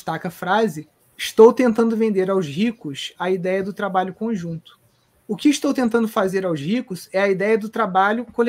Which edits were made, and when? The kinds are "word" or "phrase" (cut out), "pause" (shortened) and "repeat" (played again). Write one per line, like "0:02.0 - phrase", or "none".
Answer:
0:01.0 - pause
0:05.0 - pause